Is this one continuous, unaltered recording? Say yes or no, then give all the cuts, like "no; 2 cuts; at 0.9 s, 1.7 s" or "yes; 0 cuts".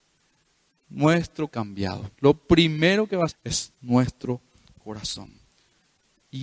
no; 3 cuts; at 1.5 s, 2.1 s, 3.3 s